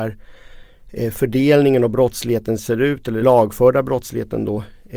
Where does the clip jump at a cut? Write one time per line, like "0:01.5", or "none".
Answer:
0:03.2